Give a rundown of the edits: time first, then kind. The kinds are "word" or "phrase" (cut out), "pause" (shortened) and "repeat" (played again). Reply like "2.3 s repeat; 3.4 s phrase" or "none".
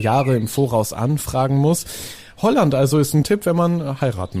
3.2 s word

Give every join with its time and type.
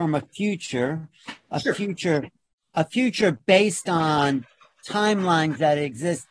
none

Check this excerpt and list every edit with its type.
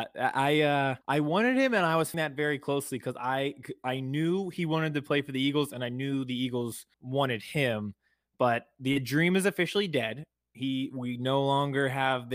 1.0 s pause; 2.1 s word; 6.9 s pause

